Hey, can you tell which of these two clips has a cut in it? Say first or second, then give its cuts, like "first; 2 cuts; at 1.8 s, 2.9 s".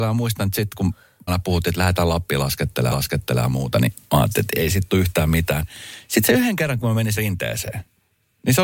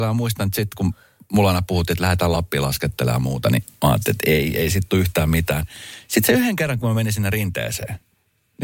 first; 4 cuts; at 1.3 s, 2.9 s, 4.5 s, 7.2 s